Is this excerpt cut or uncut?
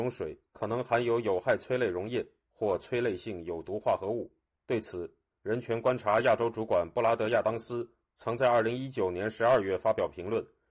uncut